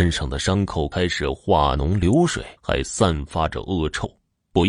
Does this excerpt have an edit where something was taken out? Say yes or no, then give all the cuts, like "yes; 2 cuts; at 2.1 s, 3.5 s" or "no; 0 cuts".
yes; 1 cut; at 2.6 s